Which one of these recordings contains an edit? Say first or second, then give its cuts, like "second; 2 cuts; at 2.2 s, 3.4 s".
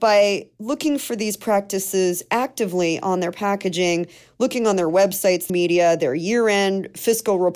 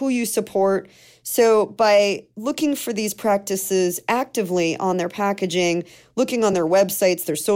first; 1 cut; at 5.5 s